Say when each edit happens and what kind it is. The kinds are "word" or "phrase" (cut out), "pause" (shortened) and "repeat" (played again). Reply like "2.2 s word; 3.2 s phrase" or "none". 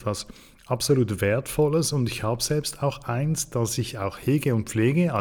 none